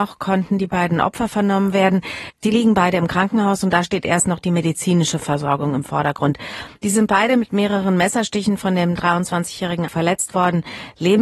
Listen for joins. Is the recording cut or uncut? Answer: cut